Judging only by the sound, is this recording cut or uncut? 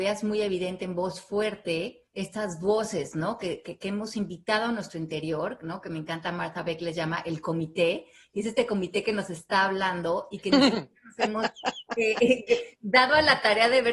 cut